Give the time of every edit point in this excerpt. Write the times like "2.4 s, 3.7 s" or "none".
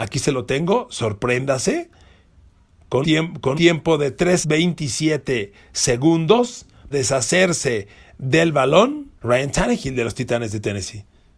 3.0 s, 3.5 s, 4.4 s, 6.9 s, 9.2 s